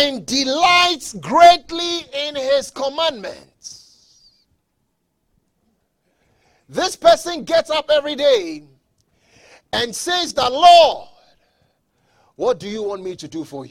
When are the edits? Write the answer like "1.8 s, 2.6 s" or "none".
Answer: none